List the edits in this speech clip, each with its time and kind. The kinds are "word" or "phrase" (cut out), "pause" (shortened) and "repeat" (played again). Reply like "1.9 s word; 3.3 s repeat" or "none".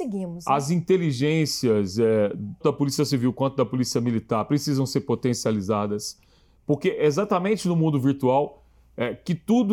2.6 s word